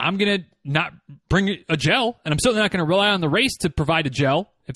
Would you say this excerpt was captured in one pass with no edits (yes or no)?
yes